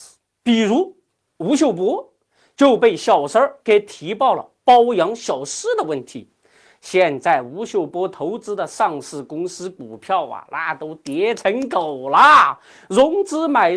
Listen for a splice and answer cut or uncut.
uncut